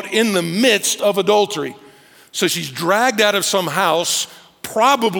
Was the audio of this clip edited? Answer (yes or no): no